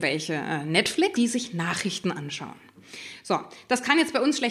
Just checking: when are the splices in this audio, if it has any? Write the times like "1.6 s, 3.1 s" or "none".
1.2 s